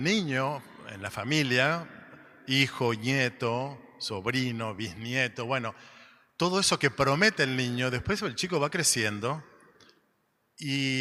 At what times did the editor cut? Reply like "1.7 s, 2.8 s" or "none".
none